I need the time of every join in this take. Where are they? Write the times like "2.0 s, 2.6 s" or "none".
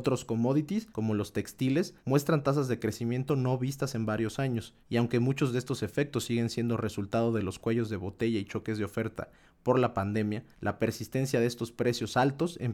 0.9 s, 2.0 s, 4.8 s, 10.5 s